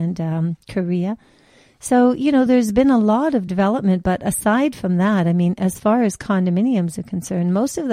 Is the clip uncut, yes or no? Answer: yes